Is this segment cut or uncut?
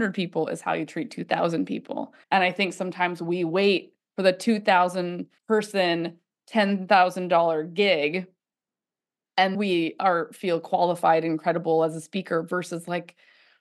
cut